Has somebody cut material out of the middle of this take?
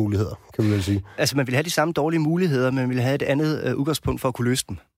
no; 0 cuts

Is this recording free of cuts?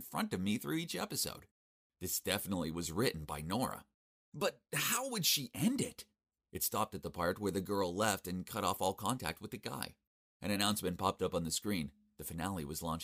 yes; 0 cuts

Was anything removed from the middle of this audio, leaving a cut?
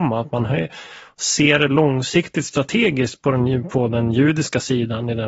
no; 0 cuts

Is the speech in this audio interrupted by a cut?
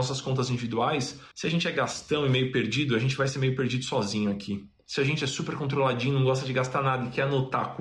yes; 1 cut; at 1.3 s

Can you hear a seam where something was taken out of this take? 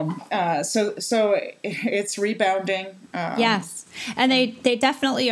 no; 0 cuts

